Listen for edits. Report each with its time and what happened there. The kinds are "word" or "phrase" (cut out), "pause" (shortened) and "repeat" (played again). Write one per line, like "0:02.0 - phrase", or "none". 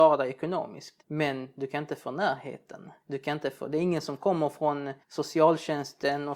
0:01.0 - pause
0:03.0 - pause
0:05.0 - pause